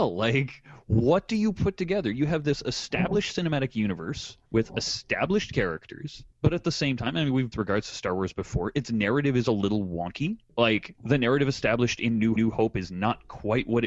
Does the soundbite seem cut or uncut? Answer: cut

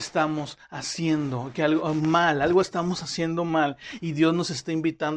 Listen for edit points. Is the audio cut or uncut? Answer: uncut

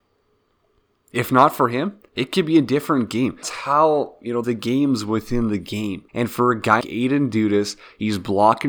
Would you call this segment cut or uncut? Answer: cut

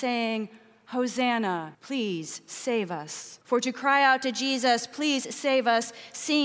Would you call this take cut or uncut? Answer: cut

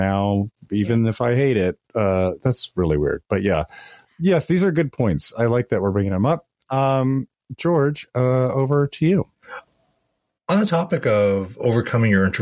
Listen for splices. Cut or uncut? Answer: uncut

